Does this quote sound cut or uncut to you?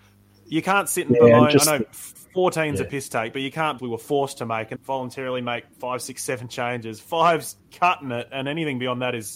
cut